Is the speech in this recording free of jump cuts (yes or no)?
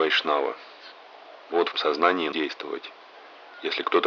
no